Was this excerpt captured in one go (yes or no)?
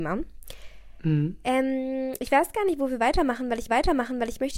no